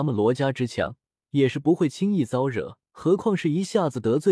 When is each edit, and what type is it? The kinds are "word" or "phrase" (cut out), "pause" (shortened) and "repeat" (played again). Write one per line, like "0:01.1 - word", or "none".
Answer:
0:01.1 - pause
0:02.9 - pause